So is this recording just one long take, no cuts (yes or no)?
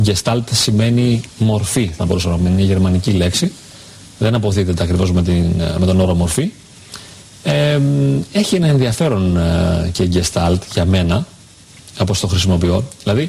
yes